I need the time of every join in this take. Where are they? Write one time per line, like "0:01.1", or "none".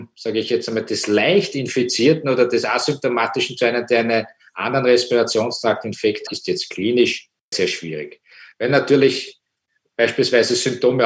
0:06.3
0:07.5

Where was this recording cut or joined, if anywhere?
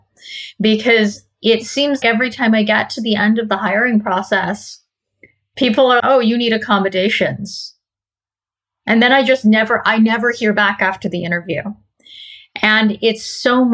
0:02.0
0:06.0

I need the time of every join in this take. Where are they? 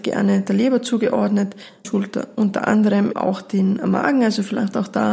0:01.8
0:03.1

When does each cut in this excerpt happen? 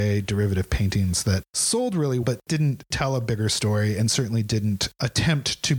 0:02.2

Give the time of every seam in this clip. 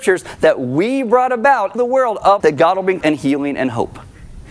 0:01.7
0:02.4
0:03.0

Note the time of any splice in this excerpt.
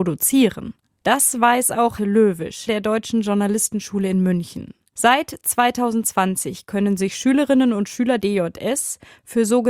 0:02.0
0:02.7
0:08.2

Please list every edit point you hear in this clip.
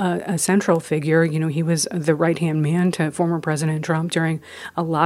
none

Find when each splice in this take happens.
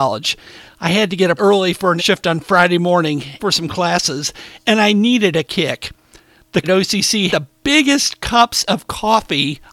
0:01.4
0:02.0
0:03.4
0:05.4
0:06.6
0:07.3

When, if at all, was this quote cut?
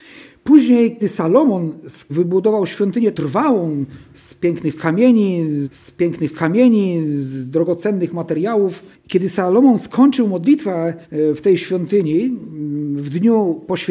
0:01.0
0:02.1
0:03.1
0:05.6
0:08.9
0:11.0

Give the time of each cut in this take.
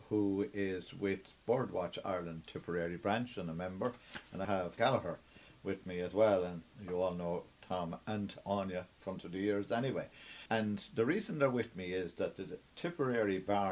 0:04.4
0:04.8
0:09.2
0:10.5

